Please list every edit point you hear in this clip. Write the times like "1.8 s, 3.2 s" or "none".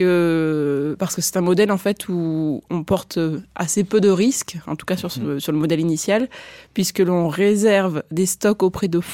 none